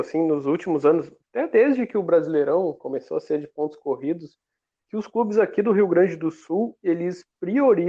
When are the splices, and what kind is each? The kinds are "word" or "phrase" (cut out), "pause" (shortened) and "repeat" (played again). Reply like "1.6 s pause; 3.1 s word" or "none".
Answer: none